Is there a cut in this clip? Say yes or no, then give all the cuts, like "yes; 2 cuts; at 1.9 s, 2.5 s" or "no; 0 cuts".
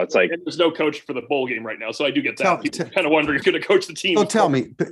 yes; 1 cut; at 3.4 s